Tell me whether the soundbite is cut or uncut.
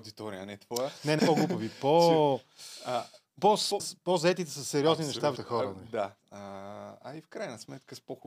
cut